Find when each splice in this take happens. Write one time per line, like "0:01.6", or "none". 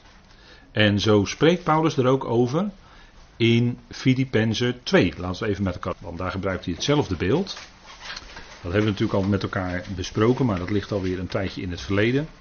0:05.9